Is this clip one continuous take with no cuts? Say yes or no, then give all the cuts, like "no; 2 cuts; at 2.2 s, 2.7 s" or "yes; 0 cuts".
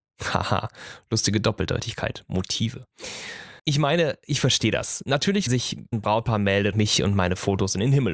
no; 4 cuts; at 3.6 s, 5.5 s, 5.9 s, 6.7 s